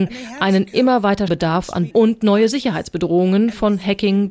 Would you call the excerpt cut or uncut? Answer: cut